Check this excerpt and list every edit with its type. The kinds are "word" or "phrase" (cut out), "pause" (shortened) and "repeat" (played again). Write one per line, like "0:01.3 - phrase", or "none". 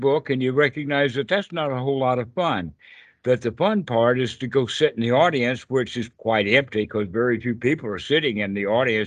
none